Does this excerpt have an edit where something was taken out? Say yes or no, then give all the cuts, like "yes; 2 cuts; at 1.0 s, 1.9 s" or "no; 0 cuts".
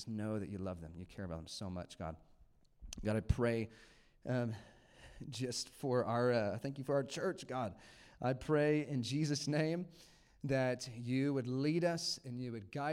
no; 0 cuts